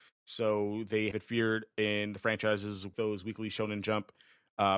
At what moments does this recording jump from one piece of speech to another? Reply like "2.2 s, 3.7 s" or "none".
1.1 s, 2.9 s